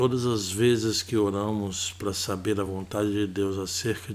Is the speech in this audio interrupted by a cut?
no; 0 cuts

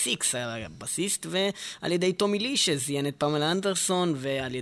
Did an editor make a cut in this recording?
no; 0 cuts

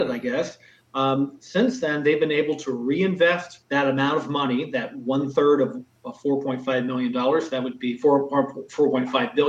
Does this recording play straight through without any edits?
no; 1 cut; at 3.6 s

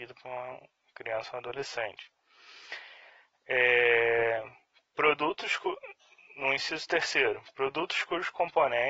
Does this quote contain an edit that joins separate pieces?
no; 0 cuts

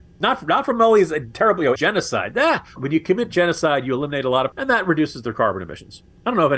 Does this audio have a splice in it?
yes; 3 cuts; at 1.8 s, 2.8 s, 4.5 s

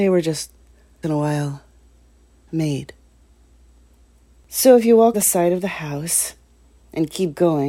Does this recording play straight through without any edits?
no; 2 cuts; at 1.0 s, 5.1 s

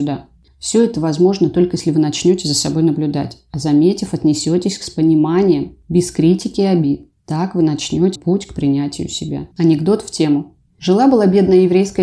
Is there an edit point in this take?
yes; 2 cuts; at 8.2 s, 9.5 s

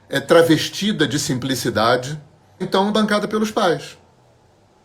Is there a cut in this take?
yes; 2 cuts; at 2.6 s, 2.9 s

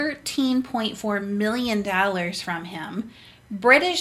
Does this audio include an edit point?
no; 0 cuts

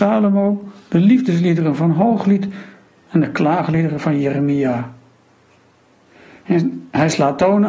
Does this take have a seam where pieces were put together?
no; 0 cuts

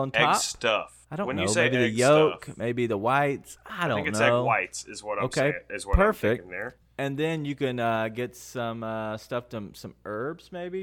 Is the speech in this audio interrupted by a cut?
yes; 1 cut; at 1.0 s

